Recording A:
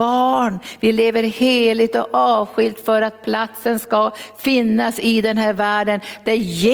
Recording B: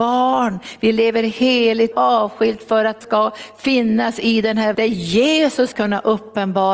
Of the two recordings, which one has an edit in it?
B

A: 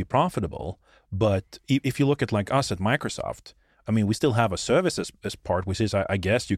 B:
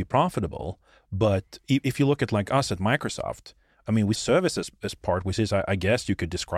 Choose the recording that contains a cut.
B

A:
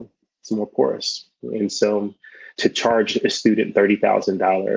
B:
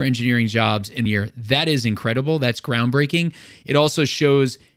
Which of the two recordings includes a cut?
B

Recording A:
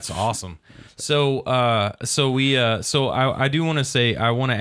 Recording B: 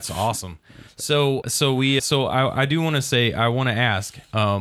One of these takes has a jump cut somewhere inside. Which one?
B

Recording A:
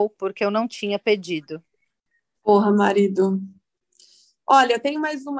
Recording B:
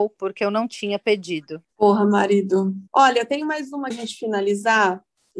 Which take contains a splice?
B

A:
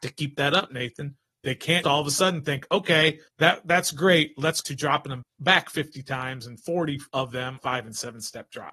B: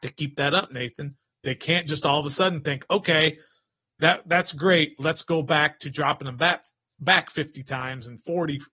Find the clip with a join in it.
A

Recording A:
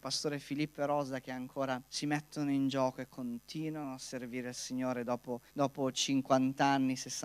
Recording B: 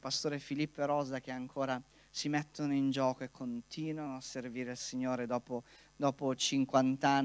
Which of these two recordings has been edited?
A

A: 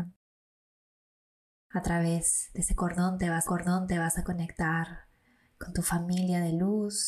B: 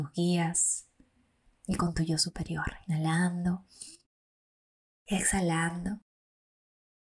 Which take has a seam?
A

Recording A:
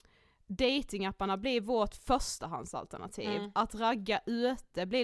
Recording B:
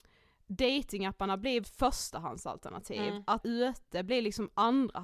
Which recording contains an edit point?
B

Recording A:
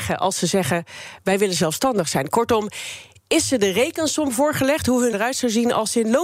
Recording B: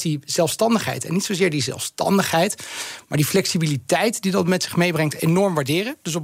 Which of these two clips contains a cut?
A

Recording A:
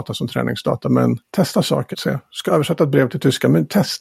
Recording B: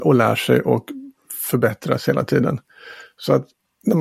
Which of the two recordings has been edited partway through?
A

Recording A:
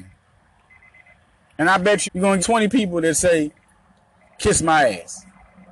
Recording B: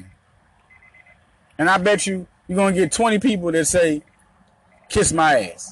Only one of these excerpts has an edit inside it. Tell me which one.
A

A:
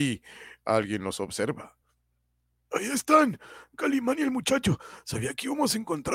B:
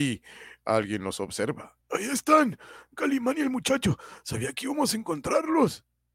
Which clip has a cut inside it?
B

